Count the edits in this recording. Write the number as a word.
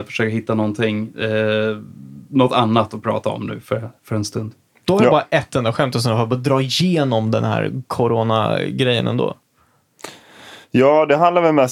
zero